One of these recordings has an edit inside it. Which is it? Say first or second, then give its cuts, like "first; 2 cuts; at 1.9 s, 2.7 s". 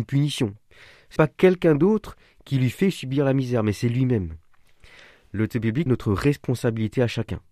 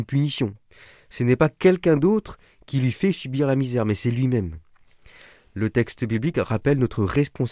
first; 3 cuts; at 1.2 s, 5.5 s, 5.9 s